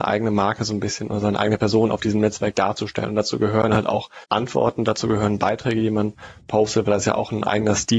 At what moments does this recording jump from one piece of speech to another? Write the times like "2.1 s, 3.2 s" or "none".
4.2 s